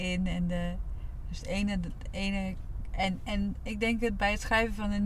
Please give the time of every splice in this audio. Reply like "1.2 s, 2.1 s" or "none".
none